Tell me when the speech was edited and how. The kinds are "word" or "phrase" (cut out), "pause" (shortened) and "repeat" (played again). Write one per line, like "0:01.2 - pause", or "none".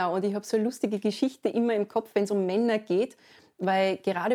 none